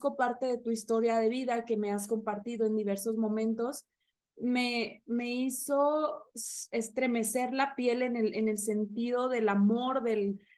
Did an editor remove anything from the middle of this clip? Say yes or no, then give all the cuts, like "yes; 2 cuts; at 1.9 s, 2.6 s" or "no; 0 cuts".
no; 0 cuts